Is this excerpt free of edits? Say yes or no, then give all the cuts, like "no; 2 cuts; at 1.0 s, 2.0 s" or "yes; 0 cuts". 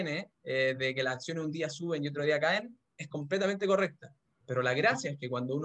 yes; 0 cuts